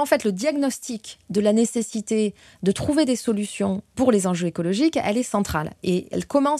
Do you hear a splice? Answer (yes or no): no